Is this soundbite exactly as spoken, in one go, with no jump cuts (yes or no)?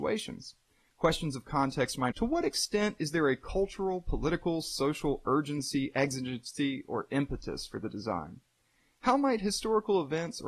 no